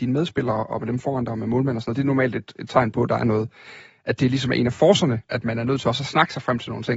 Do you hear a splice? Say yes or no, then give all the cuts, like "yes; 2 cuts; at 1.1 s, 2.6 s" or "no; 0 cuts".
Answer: no; 0 cuts